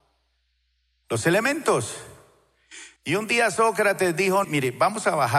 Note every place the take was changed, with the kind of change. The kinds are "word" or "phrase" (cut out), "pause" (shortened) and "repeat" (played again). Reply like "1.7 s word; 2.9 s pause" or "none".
3.0 s pause; 4.4 s word